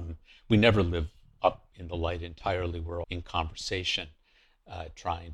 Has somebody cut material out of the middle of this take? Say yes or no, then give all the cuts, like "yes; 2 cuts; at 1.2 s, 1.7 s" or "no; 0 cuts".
yes; 1 cut; at 3.0 s